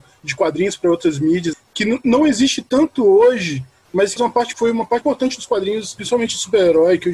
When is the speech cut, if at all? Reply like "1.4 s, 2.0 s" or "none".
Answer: 1.5 s, 4.2 s, 4.5 s, 5.0 s